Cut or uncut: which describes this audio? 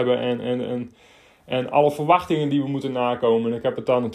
uncut